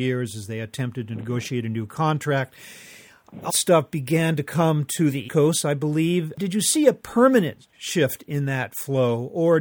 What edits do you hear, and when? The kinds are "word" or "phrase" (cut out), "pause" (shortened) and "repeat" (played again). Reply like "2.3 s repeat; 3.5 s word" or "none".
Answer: 3.5 s phrase; 5.3 s word; 7.7 s pause

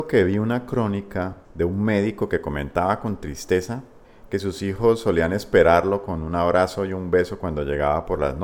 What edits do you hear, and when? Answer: 1.4 s pause

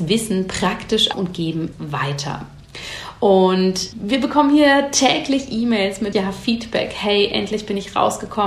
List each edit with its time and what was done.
1.1 s word; 1.7 s word; 3.9 s word; 6.1 s word

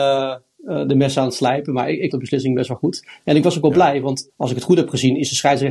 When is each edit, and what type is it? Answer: 2.1 s word; 4.3 s word

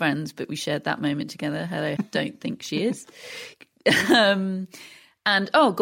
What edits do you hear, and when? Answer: 2.0 s phrase

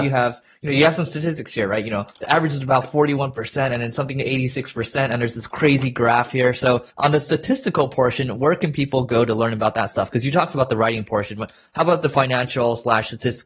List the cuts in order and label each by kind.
2.1 s pause; 6.9 s pause

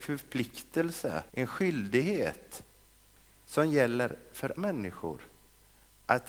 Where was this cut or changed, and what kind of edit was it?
1.3 s pause; 3.0 s pause; 4.6 s word

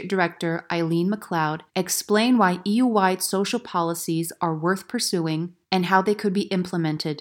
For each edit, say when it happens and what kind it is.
1.7 s pause; 5.6 s pause

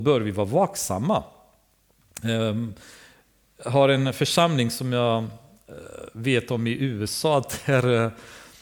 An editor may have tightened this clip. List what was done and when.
none

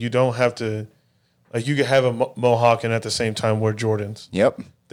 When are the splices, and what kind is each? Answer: none

